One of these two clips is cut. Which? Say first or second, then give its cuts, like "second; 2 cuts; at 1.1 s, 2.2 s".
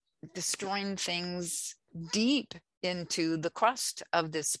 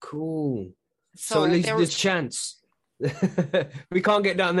second; 1 cut; at 1.9 s